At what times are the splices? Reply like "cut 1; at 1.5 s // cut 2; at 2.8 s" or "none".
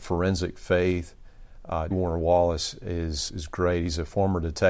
cut 1; at 1.9 s // cut 2; at 3.3 s